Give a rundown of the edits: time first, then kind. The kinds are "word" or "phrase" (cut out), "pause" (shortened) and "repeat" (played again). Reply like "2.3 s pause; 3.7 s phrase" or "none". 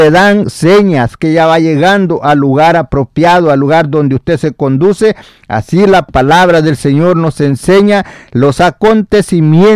1.2 s phrase

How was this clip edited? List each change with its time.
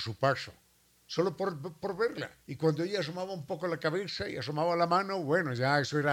2.4 s pause

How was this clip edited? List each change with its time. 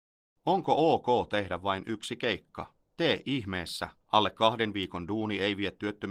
2.8 s pause; 4.0 s pause

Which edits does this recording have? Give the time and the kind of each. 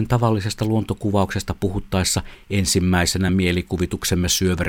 none

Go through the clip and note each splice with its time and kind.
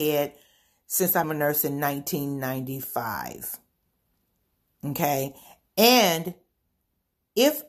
1.2 s word

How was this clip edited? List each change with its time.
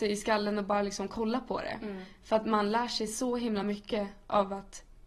none

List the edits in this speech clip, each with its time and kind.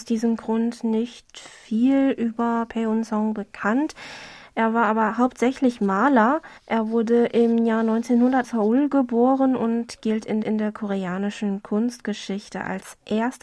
6.6 s pause; 8.4 s word; 10.4 s repeat

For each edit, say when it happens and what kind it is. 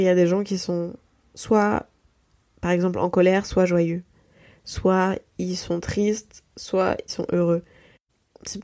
7.1 s word

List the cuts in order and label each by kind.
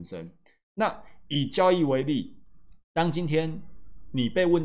2.8 s pause

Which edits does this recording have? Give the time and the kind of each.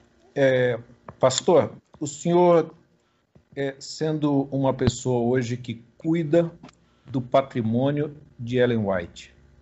none

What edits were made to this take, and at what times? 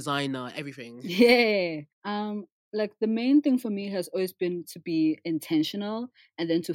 1.9 s pause

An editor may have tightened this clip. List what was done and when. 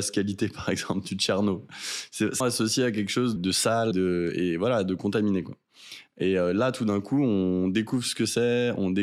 2.4 s word; 3.4 s phrase; 3.9 s word

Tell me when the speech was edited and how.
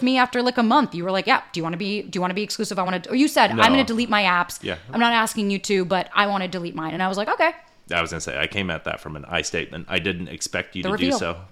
none

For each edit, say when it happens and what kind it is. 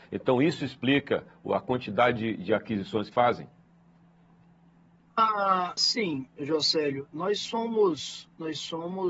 3.1 s word; 5.8 s word

